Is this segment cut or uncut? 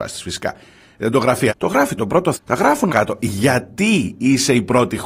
cut